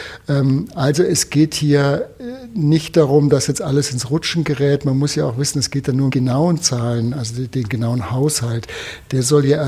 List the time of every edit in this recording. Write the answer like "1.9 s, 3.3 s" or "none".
6.1 s